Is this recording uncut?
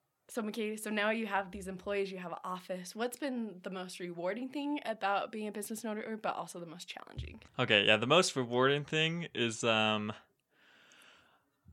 no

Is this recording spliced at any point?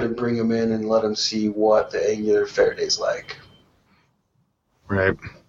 no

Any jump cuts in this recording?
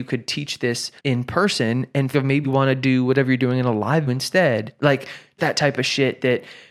yes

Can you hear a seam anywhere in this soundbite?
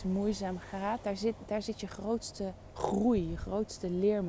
no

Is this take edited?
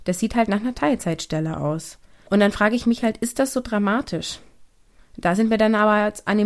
no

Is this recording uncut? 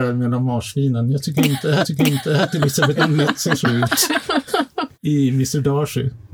no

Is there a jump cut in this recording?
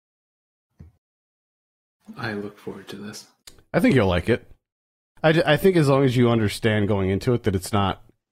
no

